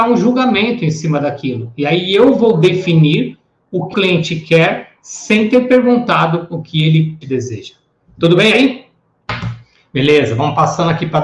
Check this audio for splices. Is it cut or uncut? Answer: cut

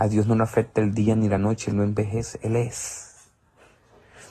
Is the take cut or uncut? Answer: uncut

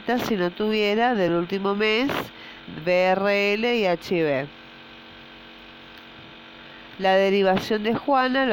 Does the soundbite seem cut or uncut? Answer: uncut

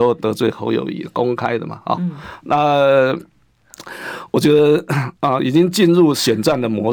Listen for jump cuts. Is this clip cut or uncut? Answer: cut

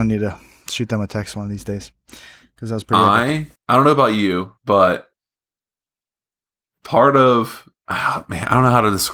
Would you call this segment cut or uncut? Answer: cut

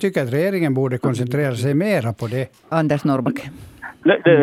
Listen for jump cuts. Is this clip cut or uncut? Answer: cut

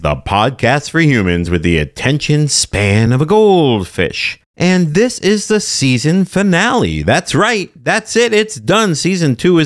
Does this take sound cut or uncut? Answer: uncut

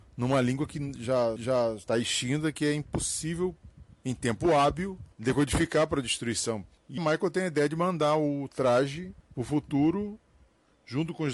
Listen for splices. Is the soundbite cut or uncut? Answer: cut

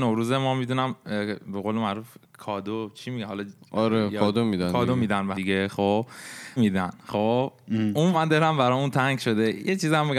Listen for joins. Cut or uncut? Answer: cut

